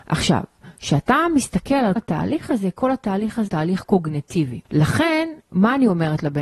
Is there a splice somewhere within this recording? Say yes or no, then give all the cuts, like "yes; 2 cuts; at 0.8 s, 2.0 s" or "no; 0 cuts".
yes; 3 cuts; at 2.0 s, 3.5 s, 4.7 s